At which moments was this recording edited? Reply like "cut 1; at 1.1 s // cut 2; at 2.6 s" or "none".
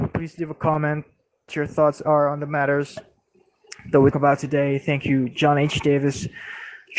cut 1; at 1.5 s // cut 2; at 4.1 s